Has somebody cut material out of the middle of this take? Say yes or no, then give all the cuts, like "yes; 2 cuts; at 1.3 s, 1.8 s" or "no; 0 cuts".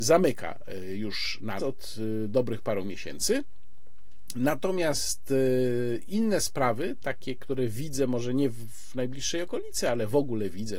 yes; 1 cut; at 1.6 s